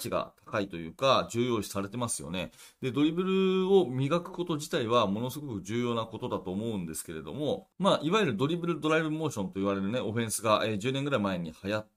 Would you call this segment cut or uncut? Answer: cut